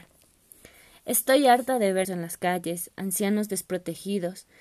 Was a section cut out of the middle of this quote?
yes; 1 cut; at 2.0 s

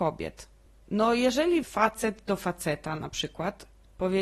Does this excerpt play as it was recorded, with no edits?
no; 1 cut; at 1.6 s

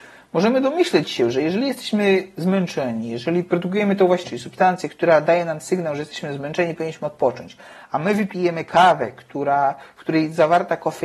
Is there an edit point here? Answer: yes; 1 cut; at 4.2 s

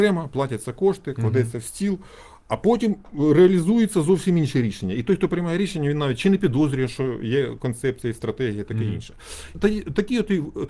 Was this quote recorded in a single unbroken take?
no; 1 cut; at 9.5 s

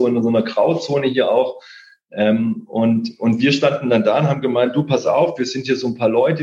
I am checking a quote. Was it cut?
no; 0 cuts

